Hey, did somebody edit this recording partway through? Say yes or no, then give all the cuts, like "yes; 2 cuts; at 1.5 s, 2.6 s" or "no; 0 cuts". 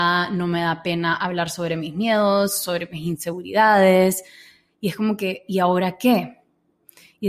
no; 0 cuts